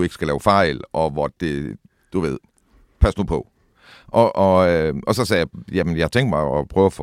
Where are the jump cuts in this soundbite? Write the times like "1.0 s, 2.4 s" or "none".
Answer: none

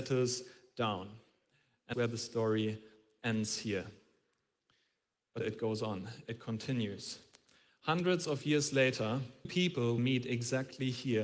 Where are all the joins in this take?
1.9 s, 5.4 s, 9.4 s, 10.0 s

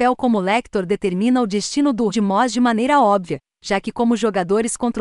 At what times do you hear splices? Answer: 2.1 s

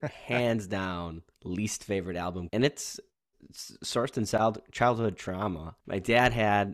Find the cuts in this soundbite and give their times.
1.3 s, 2.5 s, 5.8 s

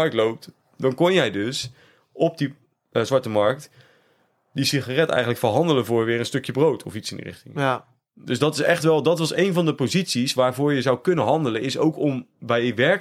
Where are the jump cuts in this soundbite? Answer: none

